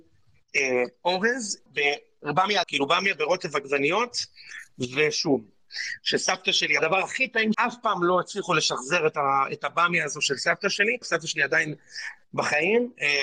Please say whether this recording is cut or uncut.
cut